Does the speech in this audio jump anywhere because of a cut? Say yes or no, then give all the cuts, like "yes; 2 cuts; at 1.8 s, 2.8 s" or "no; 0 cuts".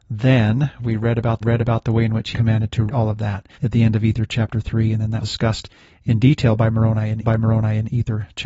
yes; 6 cuts; at 1.4 s, 2.3 s, 2.9 s, 3.5 s, 5.2 s, 7.2 s